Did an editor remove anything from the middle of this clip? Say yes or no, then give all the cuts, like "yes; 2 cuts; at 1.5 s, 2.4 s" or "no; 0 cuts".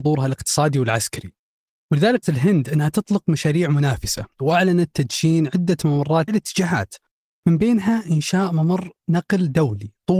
yes; 2 cuts; at 2.2 s, 6.3 s